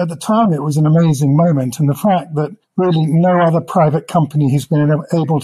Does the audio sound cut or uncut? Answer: cut